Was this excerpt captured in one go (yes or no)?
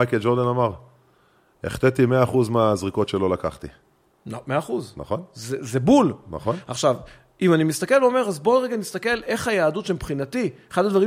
yes